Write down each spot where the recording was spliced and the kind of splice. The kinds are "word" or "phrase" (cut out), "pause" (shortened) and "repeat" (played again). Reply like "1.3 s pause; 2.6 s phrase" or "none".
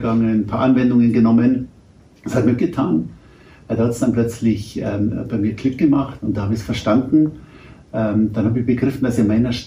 2.6 s word; 6.2 s word